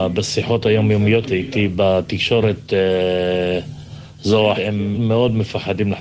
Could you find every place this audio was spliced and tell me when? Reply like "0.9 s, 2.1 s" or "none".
1.2 s, 4.6 s, 4.9 s